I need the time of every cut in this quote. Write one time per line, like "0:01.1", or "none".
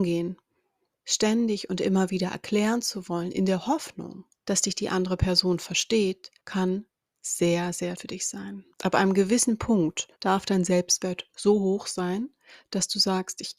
0:00.9
0:04.3
0:06.4
0:07.9
0:08.7
0:10.1